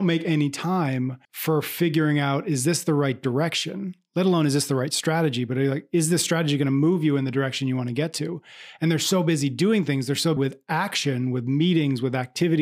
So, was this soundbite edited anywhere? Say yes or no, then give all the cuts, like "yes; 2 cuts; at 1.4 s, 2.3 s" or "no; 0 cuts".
yes; 2 cuts; at 1.2 s, 10.4 s